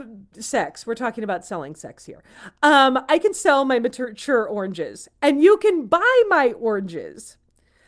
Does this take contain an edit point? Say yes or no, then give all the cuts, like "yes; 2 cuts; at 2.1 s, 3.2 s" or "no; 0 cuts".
no; 0 cuts